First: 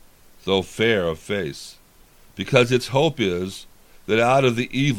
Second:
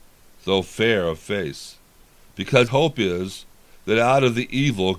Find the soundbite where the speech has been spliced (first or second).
second